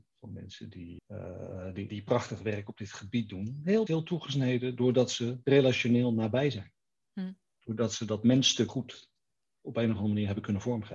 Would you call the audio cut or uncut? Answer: cut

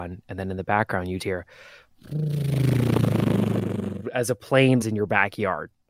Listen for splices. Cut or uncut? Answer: cut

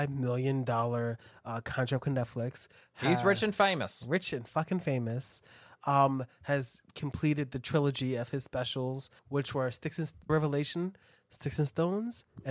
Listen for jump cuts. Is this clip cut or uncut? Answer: cut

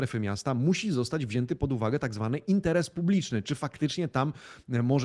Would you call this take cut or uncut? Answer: uncut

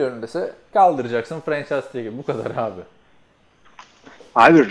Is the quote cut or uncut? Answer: uncut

